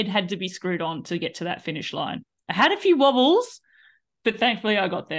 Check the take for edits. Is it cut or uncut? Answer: uncut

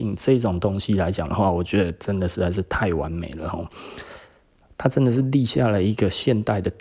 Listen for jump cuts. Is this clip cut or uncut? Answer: uncut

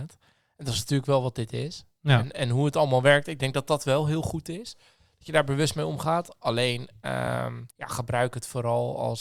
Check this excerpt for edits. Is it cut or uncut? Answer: cut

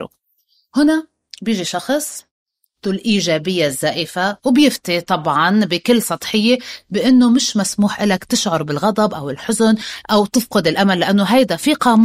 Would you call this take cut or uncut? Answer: uncut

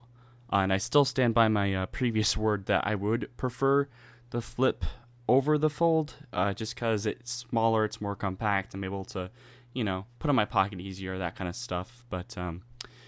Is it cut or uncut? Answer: uncut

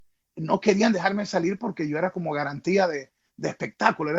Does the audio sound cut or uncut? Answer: uncut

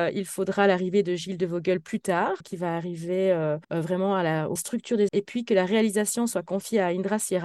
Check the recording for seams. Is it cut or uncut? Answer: cut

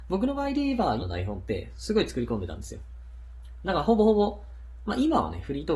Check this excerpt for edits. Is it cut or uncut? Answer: cut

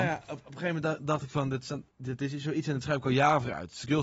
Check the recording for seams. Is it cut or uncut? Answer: cut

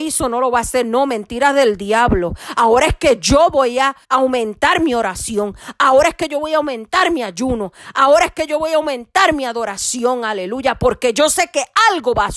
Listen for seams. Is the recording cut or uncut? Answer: cut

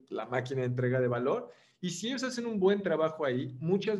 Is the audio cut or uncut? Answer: uncut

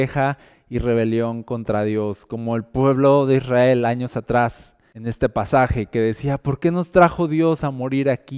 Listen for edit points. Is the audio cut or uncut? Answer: uncut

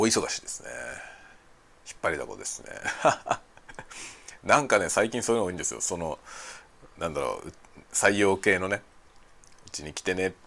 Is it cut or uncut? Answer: uncut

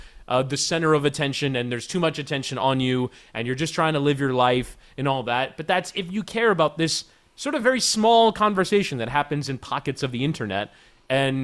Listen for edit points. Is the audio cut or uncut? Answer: uncut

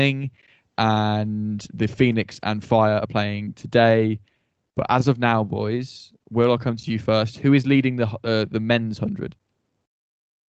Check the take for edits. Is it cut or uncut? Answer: uncut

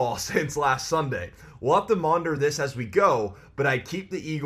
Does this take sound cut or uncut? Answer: uncut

